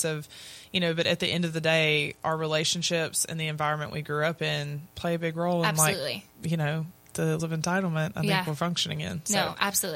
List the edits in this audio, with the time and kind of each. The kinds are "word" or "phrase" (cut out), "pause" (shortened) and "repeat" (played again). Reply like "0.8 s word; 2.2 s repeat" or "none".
4.9 s pause; 6.3 s pause; 7.4 s word